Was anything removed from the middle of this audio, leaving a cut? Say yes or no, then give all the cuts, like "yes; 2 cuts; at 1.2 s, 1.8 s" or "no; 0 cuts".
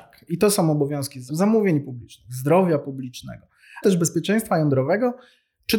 yes; 2 cuts; at 1.3 s, 3.8 s